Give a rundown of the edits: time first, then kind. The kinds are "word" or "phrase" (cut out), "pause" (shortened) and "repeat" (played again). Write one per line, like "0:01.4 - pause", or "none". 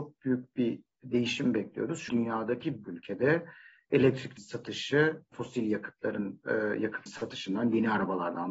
0:02.1 - word
0:02.8 - word
0:04.4 - word
0:05.3 - word
0:07.1 - word

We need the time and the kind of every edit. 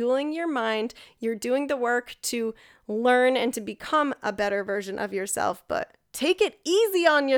none

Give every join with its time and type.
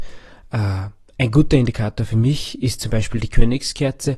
none

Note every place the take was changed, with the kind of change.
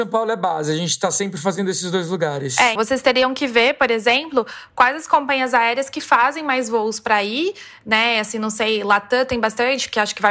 0:02.8 - word

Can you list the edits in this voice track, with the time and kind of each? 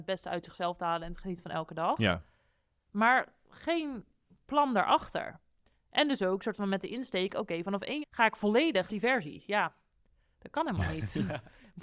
0:08.0 - word
0:08.9 - phrase

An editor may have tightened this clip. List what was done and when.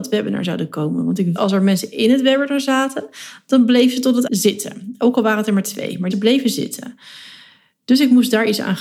0:01.4 - word
0:04.3 - word
0:06.1 - word

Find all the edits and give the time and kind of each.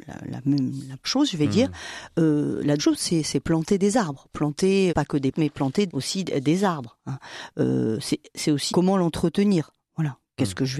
0:01.0 - word
0:02.8 - word
0:04.9 - word
0:05.3 - word
0:05.9 - word
0:08.7 - word

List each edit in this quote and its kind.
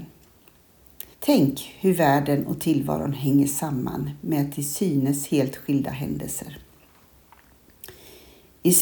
0:01.1 - pause

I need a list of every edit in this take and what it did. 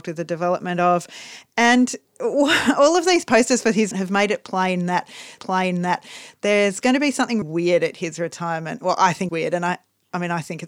0:03.9 - word
0:05.4 - repeat
0:07.4 - word
0:09.3 - word

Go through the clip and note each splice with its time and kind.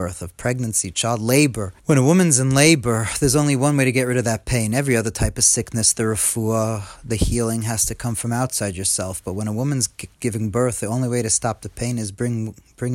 0:01.8 - pause
0:10.1 - pause

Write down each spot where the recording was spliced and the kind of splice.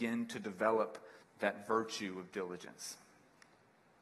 0:01.2 - pause

